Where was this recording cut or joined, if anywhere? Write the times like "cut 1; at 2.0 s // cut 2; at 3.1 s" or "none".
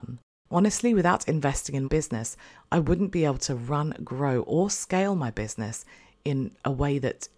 cut 1; at 1.8 s